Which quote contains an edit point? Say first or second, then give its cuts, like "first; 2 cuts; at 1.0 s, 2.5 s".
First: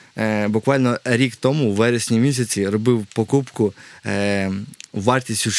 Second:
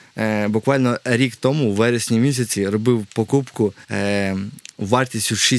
second; 1 cut; at 3.8 s